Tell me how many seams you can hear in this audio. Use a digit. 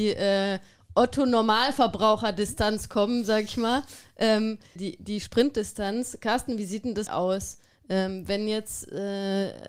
2